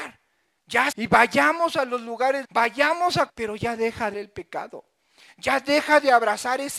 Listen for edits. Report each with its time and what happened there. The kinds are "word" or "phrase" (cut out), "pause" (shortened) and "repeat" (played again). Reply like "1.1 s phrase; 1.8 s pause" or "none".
0.9 s phrase; 2.4 s word; 3.3 s word; 4.1 s word